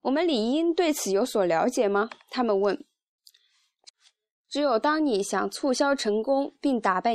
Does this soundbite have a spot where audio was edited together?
no; 0 cuts

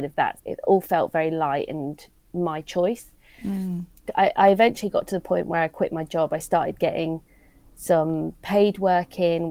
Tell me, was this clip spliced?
no; 0 cuts

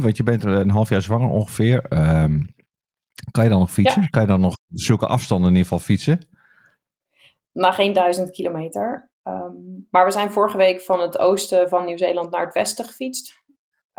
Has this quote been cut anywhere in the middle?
no; 0 cuts

